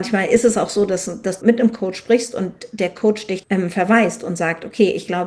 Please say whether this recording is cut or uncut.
cut